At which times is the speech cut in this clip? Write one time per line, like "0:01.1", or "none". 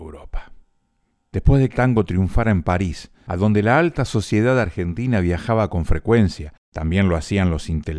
0:01.7